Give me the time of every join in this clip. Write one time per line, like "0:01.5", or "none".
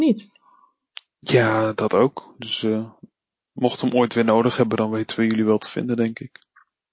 none